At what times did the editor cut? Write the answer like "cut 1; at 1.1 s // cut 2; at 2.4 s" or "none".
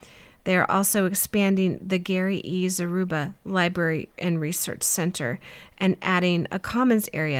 none